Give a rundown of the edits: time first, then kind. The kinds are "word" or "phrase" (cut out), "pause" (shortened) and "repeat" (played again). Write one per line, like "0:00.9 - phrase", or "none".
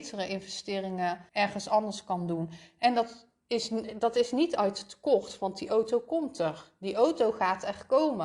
0:01.3 - pause